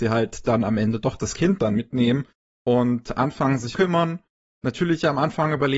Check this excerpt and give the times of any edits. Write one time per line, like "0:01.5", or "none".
0:03.7